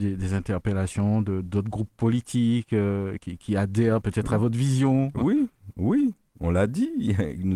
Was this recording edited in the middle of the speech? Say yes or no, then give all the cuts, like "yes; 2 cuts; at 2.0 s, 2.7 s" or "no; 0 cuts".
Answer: no; 0 cuts